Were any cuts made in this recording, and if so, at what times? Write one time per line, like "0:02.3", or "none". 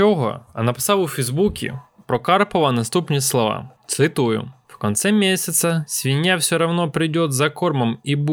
none